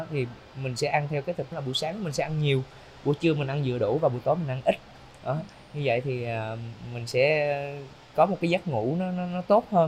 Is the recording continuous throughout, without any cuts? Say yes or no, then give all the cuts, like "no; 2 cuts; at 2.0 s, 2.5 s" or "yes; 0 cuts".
no; 1 cut; at 1.5 s